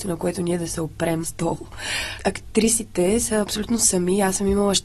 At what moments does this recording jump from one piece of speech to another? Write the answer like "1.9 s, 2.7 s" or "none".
1.2 s

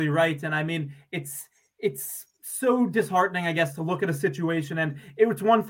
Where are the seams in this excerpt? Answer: none

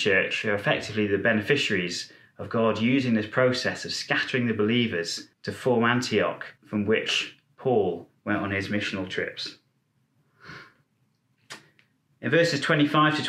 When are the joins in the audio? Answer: 5.3 s, 6.6 s

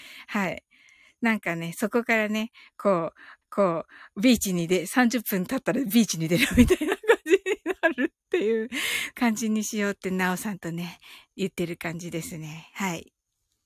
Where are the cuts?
3.4 s, 9.1 s

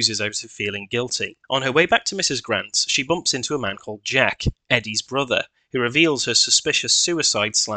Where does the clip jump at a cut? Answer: 1.4 s

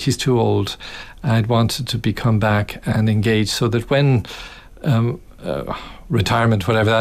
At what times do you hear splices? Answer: none

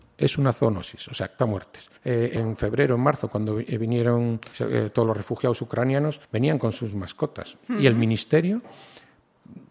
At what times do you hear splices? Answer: 1.4 s, 2.0 s, 2.4 s, 4.5 s, 6.2 s

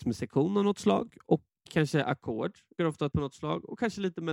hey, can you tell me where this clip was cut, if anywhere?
2.8 s, 3.1 s

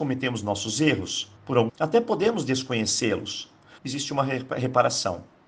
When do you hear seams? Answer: 1.4 s, 1.7 s, 3.8 s

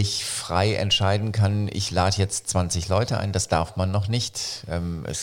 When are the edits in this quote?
none

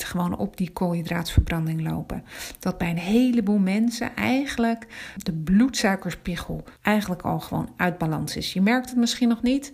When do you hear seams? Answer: 5.2 s, 6.8 s

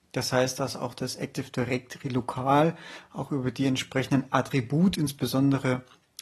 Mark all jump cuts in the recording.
4.9 s

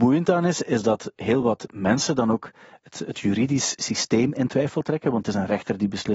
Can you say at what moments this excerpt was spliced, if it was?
none

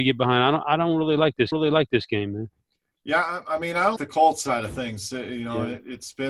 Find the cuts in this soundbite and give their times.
1.5 s, 4.0 s

